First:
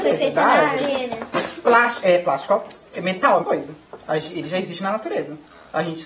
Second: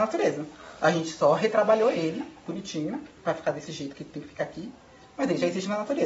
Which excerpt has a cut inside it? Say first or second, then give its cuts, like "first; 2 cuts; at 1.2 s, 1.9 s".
first; 1 cut; at 3.4 s